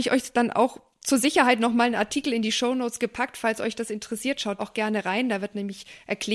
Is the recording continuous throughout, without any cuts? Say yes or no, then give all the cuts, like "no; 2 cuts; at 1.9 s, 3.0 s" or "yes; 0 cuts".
no; 1 cut; at 4.6 s